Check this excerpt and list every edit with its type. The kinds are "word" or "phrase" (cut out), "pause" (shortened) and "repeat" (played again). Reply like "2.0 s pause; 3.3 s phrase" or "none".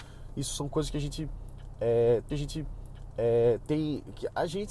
2.3 s repeat